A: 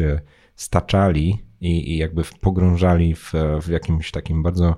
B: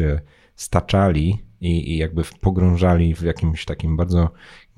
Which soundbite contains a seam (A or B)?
B